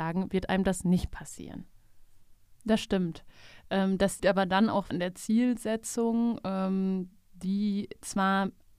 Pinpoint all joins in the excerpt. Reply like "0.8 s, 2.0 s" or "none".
4.2 s, 4.9 s

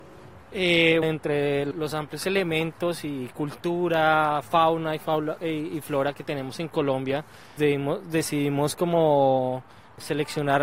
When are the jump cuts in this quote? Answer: 1.0 s, 7.6 s

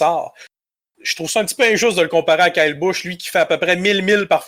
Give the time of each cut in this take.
none

